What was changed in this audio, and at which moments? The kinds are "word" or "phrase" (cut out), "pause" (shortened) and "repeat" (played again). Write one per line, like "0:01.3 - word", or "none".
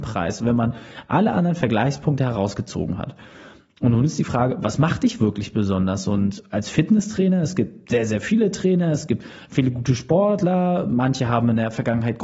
none